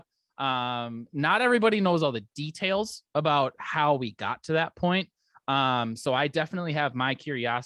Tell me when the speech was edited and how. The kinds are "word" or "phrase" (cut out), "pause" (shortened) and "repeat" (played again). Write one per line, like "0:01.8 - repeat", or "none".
none